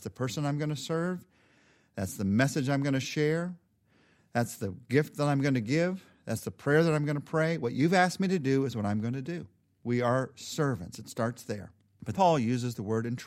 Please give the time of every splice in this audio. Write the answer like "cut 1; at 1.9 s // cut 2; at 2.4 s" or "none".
cut 1; at 12.1 s